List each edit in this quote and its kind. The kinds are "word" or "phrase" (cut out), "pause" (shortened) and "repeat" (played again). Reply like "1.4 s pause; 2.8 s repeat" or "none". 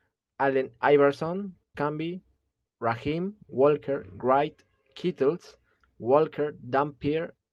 1.7 s word; 3.4 s phrase